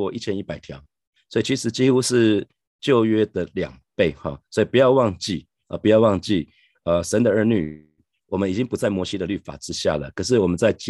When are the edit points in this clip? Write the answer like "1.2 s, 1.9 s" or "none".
none